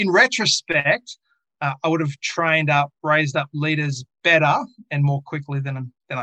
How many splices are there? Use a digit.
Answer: 1